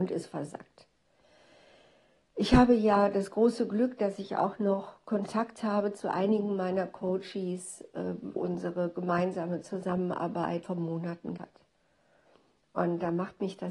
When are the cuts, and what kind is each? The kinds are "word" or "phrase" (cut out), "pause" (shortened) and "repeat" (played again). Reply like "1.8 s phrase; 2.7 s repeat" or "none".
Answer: 8.4 s word; 10.6 s word; 11.4 s word

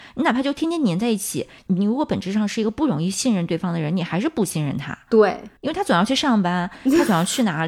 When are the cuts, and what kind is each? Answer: 5.6 s pause

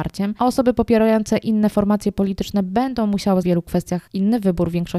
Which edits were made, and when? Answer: 3.4 s phrase

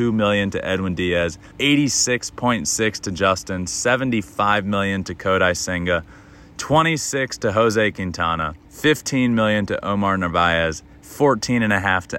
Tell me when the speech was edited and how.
1.5 s pause; 8.6 s pause

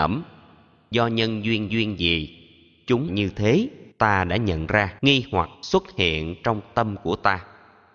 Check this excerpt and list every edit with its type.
1.7 s repeat; 3.1 s word; 3.9 s pause; 5.0 s pause; 5.5 s pause

